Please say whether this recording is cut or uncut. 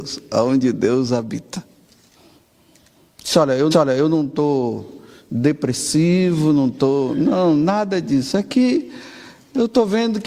cut